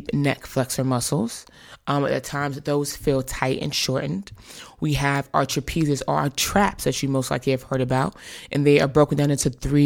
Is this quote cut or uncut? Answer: uncut